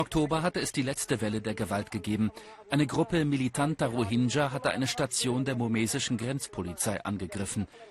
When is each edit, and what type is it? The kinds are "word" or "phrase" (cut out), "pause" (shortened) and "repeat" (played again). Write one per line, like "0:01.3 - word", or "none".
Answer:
none